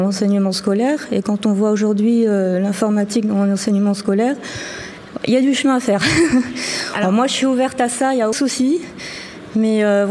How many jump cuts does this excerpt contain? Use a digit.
1